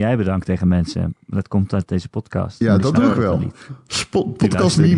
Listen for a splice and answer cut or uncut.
uncut